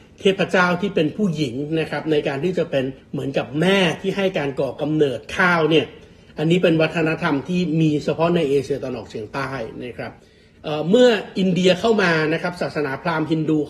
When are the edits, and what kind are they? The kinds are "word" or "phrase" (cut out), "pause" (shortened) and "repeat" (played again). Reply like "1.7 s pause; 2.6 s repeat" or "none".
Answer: 3.0 s pause